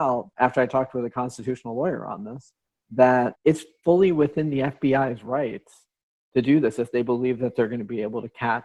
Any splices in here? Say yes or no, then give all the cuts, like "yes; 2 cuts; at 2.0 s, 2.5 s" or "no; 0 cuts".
no; 0 cuts